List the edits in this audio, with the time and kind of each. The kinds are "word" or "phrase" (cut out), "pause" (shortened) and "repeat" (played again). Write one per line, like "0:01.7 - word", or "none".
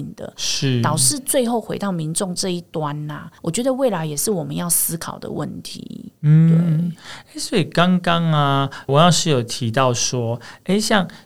0:03.4 - pause
0:08.9 - word